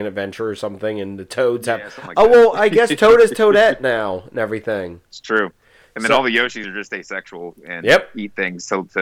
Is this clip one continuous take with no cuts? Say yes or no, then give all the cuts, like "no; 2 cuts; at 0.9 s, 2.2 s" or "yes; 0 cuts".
yes; 0 cuts